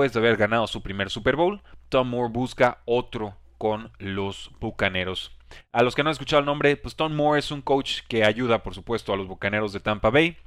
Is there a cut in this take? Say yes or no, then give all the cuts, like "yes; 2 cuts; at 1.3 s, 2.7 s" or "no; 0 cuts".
no; 0 cuts